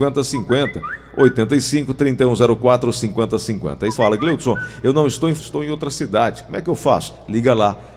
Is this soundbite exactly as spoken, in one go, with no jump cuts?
no; 2 cuts; at 3.9 s, 5.4 s

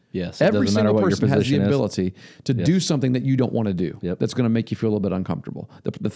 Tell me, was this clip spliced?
no; 0 cuts

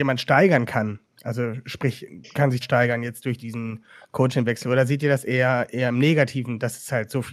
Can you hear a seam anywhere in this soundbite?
yes; 2 cuts; at 2.6 s, 3.4 s

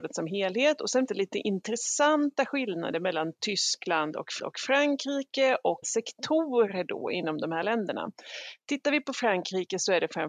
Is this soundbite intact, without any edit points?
no; 3 cuts; at 1.1 s, 4.4 s, 5.8 s

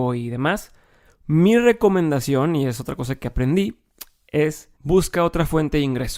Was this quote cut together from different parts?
yes; 1 cut; at 4.8 s

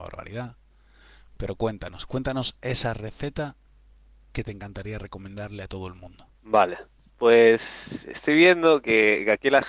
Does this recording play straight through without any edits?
no; 1 cut; at 6.3 s

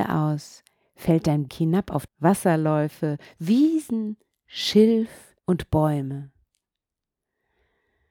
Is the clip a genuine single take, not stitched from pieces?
no; 3 cuts; at 1.5 s, 2.1 s, 5.4 s

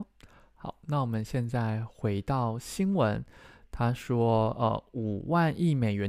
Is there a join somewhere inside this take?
no; 0 cuts

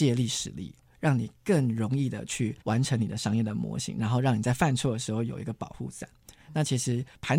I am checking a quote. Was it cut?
yes; 1 cut; at 2.6 s

